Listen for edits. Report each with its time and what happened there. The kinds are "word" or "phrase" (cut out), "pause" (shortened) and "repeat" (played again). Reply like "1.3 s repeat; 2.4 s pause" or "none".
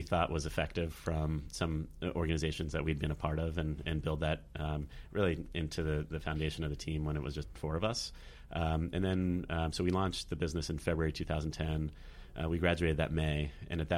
none